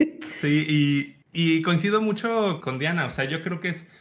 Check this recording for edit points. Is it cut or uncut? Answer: cut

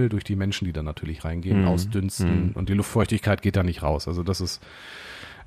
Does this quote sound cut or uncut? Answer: uncut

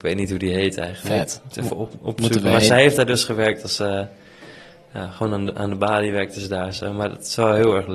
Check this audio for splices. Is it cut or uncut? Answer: uncut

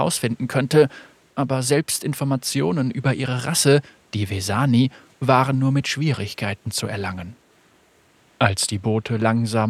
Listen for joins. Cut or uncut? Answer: uncut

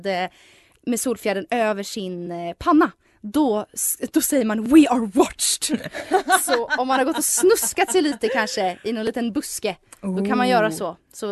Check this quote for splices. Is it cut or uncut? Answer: uncut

